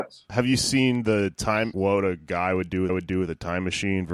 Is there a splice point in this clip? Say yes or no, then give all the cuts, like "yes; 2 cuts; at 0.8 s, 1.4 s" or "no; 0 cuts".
yes; 2 cuts; at 1.7 s, 2.9 s